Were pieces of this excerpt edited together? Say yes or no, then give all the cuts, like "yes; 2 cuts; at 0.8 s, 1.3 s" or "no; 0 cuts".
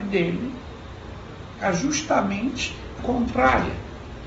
yes; 1 cut; at 3.0 s